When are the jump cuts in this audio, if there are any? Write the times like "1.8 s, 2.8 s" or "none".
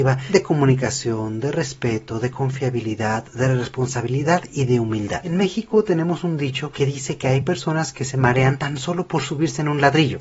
none